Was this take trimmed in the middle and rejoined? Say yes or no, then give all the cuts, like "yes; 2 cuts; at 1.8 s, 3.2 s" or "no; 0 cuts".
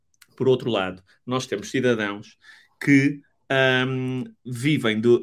no; 0 cuts